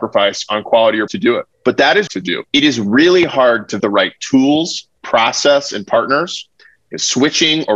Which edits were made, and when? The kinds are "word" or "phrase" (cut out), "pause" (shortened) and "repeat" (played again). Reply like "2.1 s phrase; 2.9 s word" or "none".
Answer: 1.1 s word; 1.5 s pause; 2.1 s phrase; 2.5 s pause; 3.8 s word; 4.9 s pause